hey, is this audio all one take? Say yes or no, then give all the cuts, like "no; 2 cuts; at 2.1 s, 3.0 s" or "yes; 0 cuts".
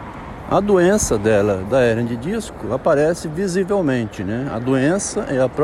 yes; 0 cuts